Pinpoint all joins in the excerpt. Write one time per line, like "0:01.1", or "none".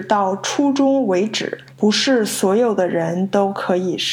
0:01.7